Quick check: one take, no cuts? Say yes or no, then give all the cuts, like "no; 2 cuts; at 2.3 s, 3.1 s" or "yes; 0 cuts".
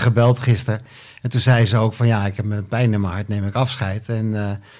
yes; 0 cuts